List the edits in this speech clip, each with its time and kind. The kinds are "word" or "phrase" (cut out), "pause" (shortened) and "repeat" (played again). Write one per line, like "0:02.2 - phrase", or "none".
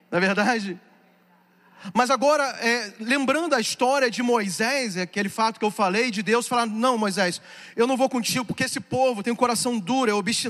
none